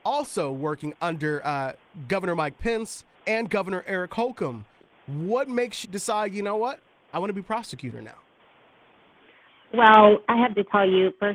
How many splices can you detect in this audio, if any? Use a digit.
3